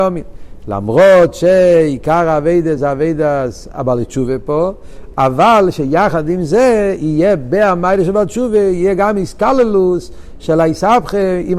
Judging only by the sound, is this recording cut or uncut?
uncut